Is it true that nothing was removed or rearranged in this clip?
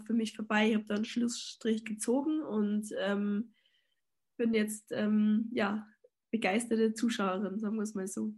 yes; 0 cuts

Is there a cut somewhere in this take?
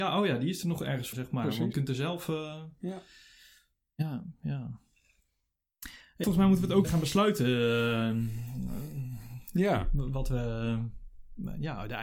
yes; 4 cuts; at 1.1 s, 1.7 s, 6.2 s, 6.8 s

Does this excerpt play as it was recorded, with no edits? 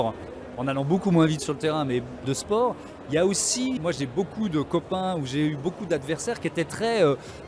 no; 2 cuts; at 2.2 s, 3.8 s

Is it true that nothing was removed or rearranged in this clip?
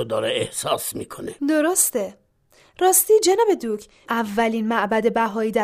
no; 2 cuts; at 1.4 s, 4.1 s

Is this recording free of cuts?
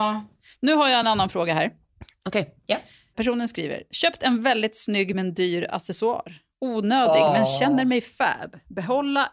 yes; 0 cuts

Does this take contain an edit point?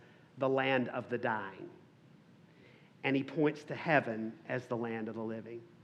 no; 0 cuts

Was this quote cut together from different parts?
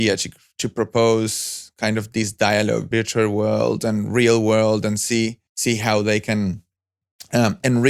yes; 2 cuts; at 2.9 s, 5.5 s

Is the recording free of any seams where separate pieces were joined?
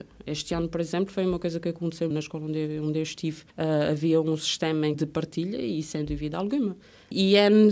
no; 3 cuts; at 2.1 s, 3.5 s, 4.9 s

